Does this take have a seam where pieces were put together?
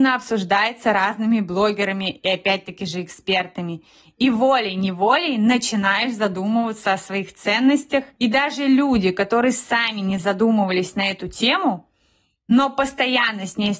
no; 0 cuts

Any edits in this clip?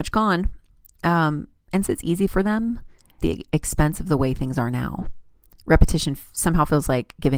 yes; 3 cuts; at 1.9 s, 2.3 s, 3.2 s

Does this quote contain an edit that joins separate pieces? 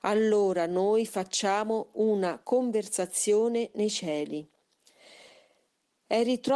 no; 0 cuts

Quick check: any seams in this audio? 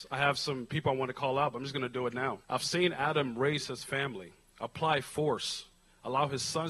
yes; 2 cuts; at 2.4 s, 4.4 s

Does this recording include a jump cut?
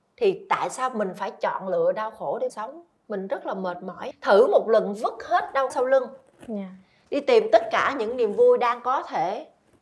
yes; 3 cuts; at 2.5 s, 4.1 s, 5.7 s

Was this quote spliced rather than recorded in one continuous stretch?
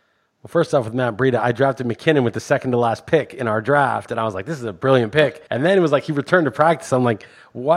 yes; 1 cut; at 5.5 s

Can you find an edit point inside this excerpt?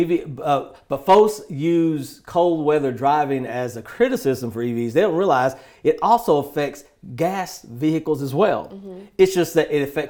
no; 0 cuts

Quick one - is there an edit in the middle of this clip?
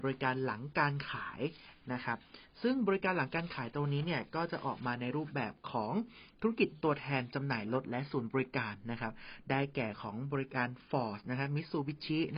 no; 0 cuts

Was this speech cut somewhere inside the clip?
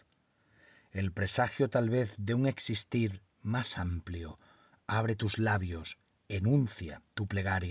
no; 0 cuts

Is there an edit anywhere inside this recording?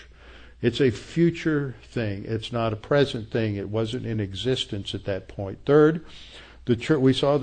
no; 0 cuts

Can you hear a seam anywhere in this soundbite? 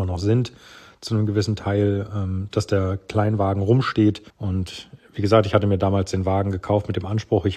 yes; 1 cut; at 4.3 s

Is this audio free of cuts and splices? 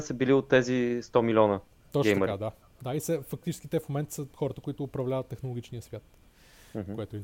yes; 0 cuts

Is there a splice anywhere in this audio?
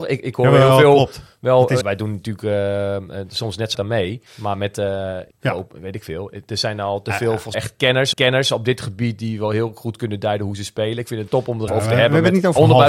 yes; 8 cuts; at 1.8 s, 3.7 s, 4.3 s, 5.3 s, 7.5 s, 8.1 s, 11.3 s, 11.7 s

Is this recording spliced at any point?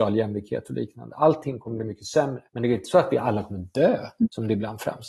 yes; 1 cut; at 2.5 s

